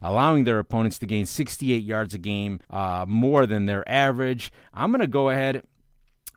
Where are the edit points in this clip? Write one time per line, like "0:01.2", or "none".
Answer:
0:02.6